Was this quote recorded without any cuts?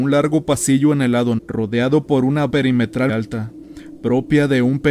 no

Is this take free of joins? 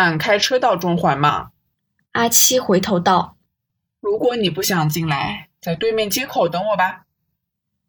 no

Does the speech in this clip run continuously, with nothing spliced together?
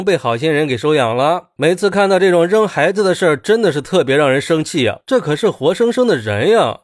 no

